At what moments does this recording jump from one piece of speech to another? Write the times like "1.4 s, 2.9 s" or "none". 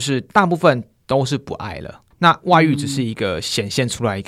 2.1 s